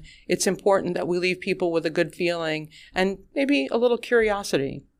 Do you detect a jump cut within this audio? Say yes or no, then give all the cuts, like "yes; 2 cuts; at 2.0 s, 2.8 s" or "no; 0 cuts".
no; 0 cuts